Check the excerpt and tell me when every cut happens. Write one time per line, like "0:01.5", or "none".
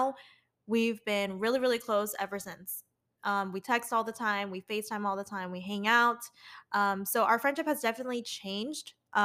none